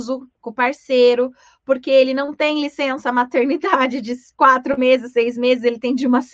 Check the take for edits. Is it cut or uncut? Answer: uncut